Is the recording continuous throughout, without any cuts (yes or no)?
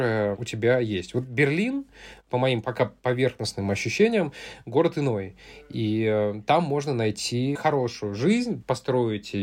yes